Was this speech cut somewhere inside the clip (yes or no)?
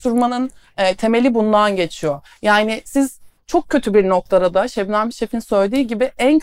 no